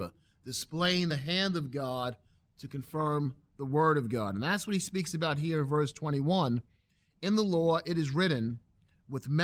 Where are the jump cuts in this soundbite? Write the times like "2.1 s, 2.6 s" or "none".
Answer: none